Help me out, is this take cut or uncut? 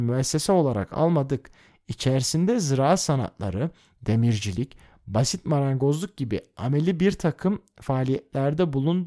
uncut